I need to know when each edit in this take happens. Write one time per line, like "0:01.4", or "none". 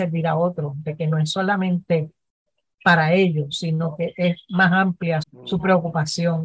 0:05.2